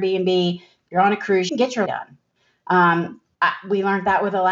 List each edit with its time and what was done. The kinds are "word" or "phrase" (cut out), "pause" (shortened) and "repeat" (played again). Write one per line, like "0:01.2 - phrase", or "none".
0:01.5 - phrase
0:01.9 - word